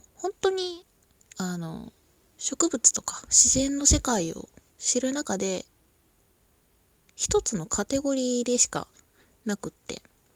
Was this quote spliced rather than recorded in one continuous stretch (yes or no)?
no